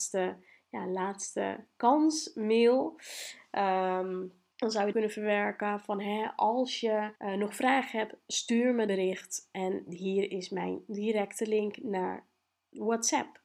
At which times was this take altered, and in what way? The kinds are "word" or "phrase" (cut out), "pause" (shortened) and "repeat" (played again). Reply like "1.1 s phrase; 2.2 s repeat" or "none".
4.5 s pause; 4.9 s phrase; 7.2 s pause; 8.9 s phrase